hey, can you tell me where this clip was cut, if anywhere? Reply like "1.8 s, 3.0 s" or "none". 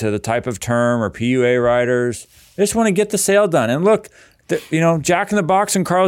none